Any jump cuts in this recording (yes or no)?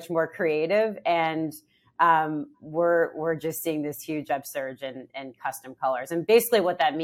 yes